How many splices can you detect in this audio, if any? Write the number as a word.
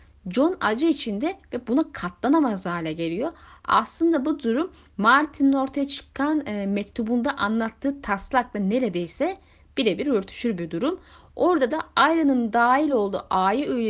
zero